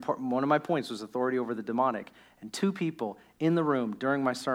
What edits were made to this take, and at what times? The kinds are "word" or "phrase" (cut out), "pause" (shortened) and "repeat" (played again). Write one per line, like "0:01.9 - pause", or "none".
none